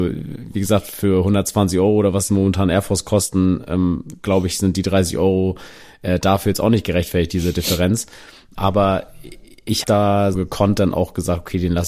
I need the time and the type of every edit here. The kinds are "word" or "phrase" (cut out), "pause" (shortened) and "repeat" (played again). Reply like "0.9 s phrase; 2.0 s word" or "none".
2.3 s word; 8.6 s word; 9.8 s word; 10.3 s word